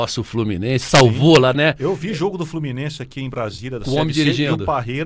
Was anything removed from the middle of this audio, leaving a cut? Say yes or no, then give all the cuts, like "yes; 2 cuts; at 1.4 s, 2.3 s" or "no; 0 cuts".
yes; 1 cut; at 1.5 s